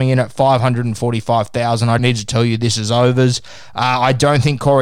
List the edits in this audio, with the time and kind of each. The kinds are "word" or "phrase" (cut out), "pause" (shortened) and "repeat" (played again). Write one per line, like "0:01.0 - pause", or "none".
0:02.0 - word